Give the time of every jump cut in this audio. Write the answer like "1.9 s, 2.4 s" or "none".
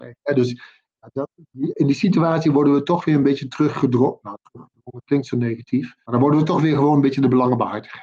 none